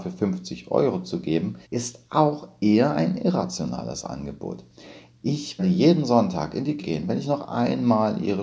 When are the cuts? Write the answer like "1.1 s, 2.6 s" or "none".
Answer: 1.6 s, 5.6 s, 6.8 s